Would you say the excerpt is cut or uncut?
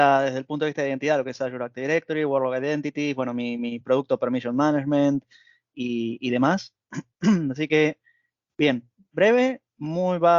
uncut